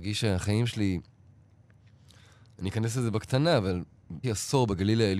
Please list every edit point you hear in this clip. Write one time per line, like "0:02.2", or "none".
0:04.2